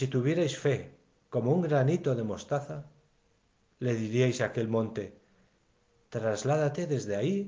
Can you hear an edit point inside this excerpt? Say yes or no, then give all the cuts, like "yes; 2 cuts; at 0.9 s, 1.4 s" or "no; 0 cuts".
no; 0 cuts